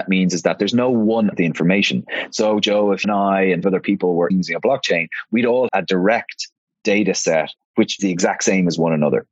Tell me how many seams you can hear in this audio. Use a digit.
6